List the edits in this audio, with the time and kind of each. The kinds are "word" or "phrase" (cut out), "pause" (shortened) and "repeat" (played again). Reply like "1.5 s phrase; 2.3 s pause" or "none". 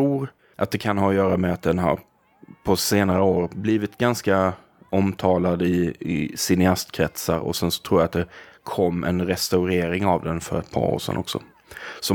none

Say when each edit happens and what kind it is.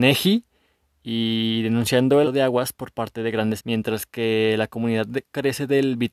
2.2 s word; 3.6 s word

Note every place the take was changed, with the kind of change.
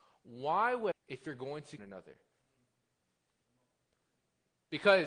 0.9 s phrase; 1.8 s phrase

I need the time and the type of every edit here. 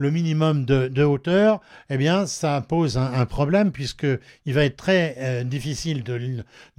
none

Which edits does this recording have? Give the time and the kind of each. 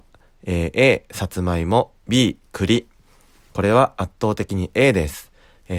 2.0 s pause

